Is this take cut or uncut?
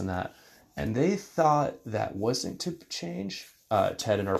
cut